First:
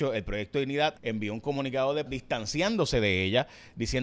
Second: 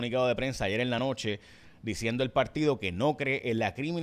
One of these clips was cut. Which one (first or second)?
first